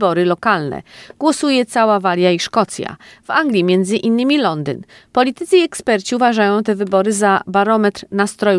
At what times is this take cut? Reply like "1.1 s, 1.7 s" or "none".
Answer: none